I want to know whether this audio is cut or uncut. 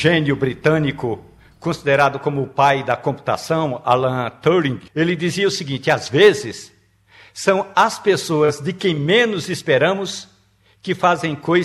cut